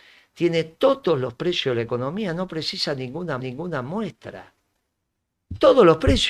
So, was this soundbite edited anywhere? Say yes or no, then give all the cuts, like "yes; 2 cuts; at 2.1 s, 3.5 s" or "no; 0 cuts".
yes; 1 cut; at 3.4 s